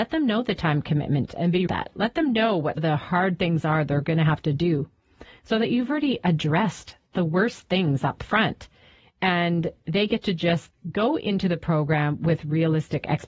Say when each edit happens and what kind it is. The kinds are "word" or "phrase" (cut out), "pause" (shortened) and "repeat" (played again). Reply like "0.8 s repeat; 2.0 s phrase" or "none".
1.7 s phrase; 2.8 s word; 10.7 s word

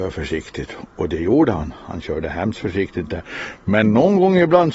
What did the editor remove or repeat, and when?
none

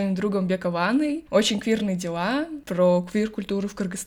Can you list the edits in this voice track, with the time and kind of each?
none

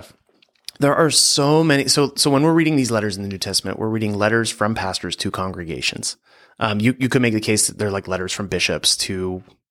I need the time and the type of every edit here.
none

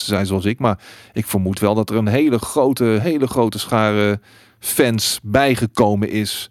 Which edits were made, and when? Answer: none

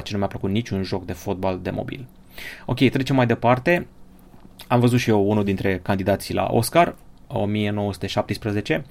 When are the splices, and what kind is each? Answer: none

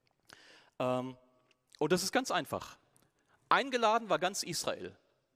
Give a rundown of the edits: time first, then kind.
none

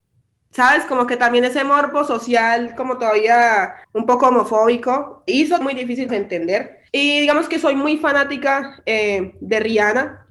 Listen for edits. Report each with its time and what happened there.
3.8 s pause; 5.3 s word; 5.6 s word; 6.1 s phrase; 6.9 s pause

